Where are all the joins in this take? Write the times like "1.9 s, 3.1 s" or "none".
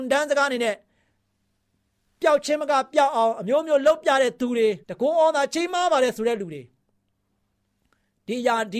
4.8 s